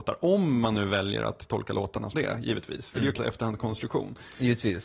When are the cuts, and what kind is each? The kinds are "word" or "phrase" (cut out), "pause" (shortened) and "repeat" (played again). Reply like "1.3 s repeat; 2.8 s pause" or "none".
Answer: 2.1 s phrase; 3.2 s phrase